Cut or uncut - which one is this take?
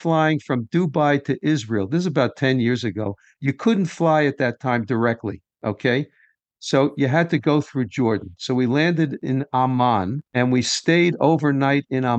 cut